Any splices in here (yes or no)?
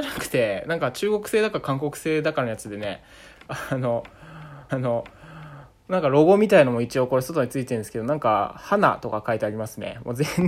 yes